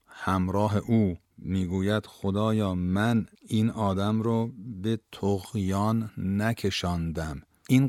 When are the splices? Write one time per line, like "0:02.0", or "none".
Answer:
0:01.2
0:03.3

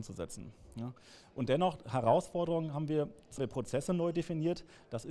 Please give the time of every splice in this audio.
0:03.4

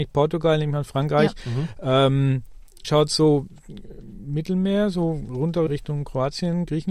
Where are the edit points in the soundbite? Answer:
0:02.8
0:05.7

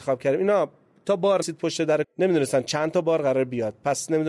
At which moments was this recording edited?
0:01.4
0:02.0

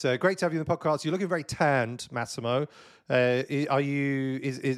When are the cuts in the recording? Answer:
none

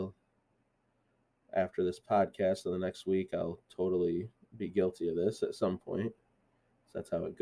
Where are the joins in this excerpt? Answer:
none

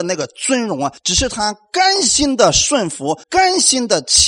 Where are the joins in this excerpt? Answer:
0:01.0
0:03.2

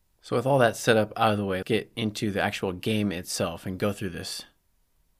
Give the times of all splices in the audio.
0:01.6

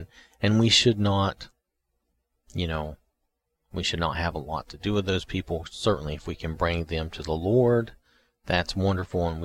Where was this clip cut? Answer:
none

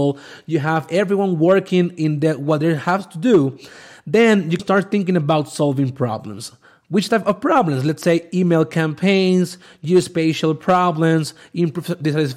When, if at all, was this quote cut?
0:04.6

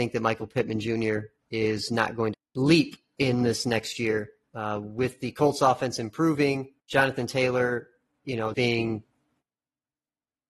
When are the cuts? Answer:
0:02.3
0:06.8
0:08.5

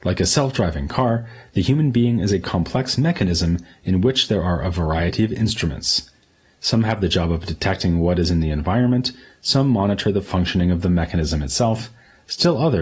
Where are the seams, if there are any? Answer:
none

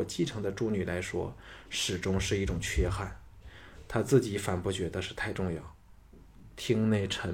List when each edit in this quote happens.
none

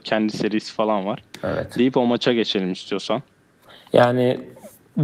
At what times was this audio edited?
none

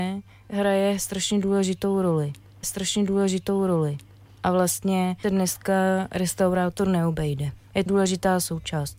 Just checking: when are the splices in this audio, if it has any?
0:02.6
0:05.2
0:07.9

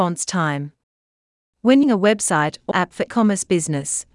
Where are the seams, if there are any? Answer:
0:01.8
0:02.7
0:03.1

